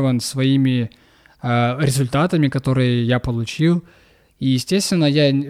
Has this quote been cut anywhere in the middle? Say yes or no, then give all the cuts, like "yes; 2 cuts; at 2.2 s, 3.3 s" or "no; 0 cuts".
no; 0 cuts